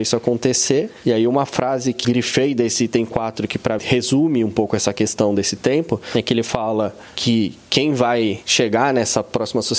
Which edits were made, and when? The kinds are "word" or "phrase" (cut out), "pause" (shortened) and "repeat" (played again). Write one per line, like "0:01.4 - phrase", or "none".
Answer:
0:02.0 - word
0:03.8 - word